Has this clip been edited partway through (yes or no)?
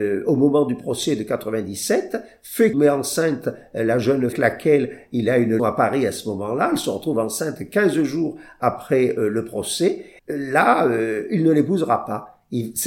yes